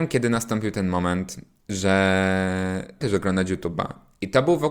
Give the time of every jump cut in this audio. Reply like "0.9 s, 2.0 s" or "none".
3.0 s